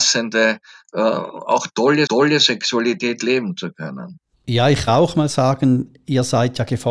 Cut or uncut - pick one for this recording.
cut